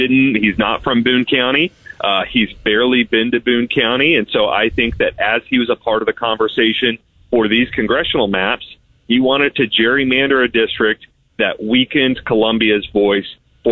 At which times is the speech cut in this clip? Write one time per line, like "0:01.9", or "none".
none